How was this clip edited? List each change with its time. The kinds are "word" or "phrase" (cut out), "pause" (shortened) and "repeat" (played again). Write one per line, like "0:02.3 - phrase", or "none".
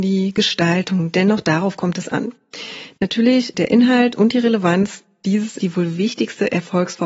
0:03.5 - word
0:05.6 - word